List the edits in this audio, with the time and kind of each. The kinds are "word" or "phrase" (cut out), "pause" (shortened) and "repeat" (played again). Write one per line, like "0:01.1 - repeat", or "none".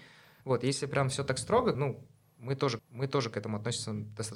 0:01.7 - word
0:02.8 - repeat